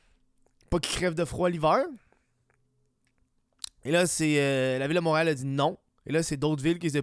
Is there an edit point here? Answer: no; 0 cuts

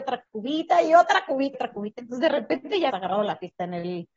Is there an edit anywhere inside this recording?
yes; 2 cuts; at 1.5 s, 2.9 s

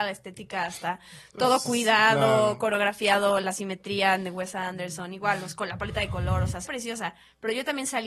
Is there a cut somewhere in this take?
yes; 1 cut; at 6.7 s

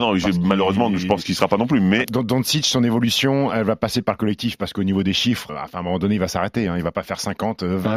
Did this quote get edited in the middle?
yes; 2 cuts; at 2.0 s, 5.5 s

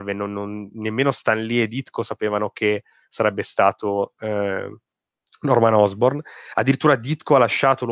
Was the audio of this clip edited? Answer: no; 0 cuts

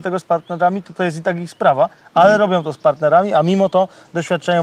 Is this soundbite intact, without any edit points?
yes; 0 cuts

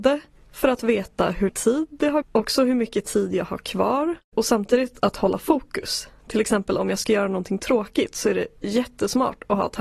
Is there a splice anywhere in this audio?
yes; 5 cuts; at 1.5 s, 2.2 s, 4.2 s, 5.0 s, 8.6 s

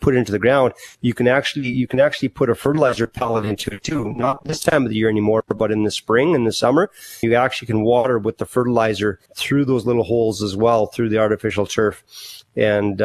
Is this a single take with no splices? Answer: no; 2 cuts; at 7.2 s, 9.3 s

